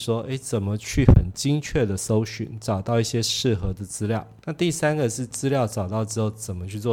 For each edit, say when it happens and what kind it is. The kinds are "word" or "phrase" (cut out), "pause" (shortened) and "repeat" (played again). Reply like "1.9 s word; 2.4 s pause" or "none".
4.4 s pause